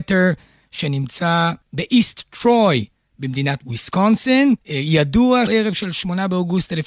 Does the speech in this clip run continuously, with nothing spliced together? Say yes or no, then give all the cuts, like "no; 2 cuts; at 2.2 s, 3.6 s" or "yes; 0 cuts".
no; 3 cuts; at 1.6 s, 4.6 s, 5.5 s